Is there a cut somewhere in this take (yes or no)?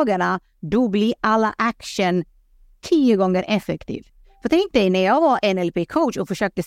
no